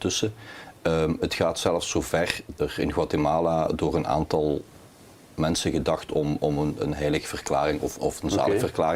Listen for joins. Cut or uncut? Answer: cut